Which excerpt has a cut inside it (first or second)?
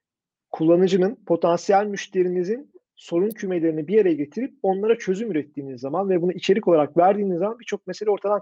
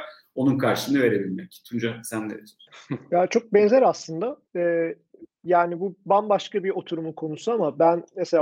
second